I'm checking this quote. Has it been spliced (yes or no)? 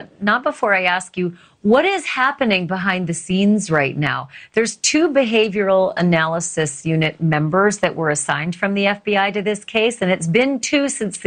no